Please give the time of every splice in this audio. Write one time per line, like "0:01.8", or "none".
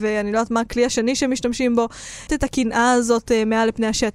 0:02.3